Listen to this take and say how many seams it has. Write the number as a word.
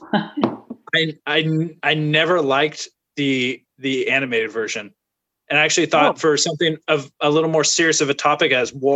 zero